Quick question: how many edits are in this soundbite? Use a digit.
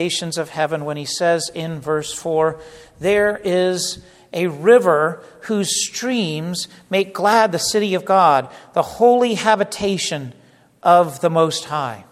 0